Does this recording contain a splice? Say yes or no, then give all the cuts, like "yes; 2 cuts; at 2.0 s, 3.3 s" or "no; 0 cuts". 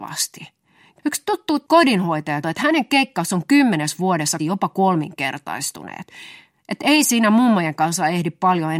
yes; 2 cuts; at 2.4 s, 4.4 s